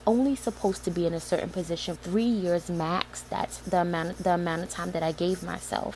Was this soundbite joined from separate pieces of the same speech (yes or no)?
yes